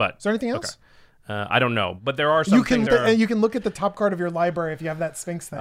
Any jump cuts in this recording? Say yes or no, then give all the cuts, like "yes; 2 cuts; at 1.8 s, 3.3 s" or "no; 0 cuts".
yes; 1 cut; at 2.9 s